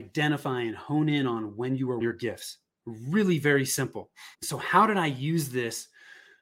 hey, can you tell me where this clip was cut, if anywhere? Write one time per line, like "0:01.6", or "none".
0:02.0
0:04.3